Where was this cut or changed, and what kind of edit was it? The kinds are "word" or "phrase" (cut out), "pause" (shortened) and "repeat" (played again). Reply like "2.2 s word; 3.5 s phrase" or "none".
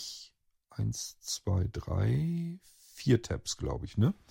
none